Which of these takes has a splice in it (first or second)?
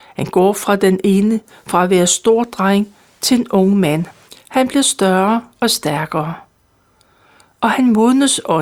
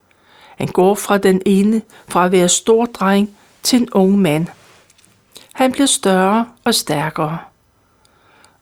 first